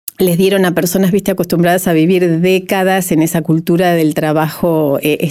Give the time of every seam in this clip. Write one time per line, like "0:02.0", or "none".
none